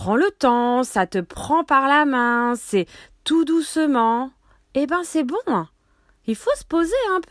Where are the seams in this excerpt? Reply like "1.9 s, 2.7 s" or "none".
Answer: none